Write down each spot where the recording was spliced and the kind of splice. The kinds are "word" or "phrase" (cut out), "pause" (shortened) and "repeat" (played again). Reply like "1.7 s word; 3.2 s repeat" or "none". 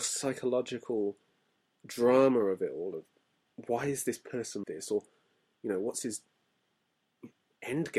4.6 s word